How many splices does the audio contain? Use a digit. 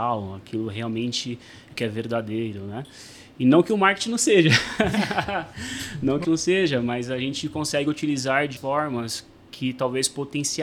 3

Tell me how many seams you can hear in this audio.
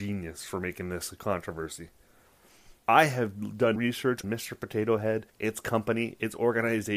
4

